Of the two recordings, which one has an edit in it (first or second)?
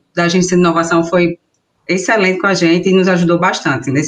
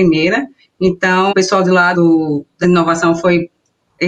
second